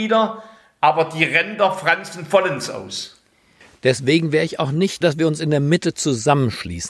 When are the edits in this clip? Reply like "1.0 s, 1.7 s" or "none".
5.0 s